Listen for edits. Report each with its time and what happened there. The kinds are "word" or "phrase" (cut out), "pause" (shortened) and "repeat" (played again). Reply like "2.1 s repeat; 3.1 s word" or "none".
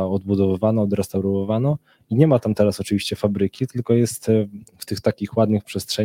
none

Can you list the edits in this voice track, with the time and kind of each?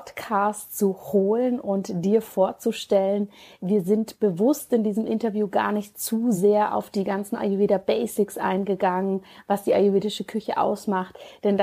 none

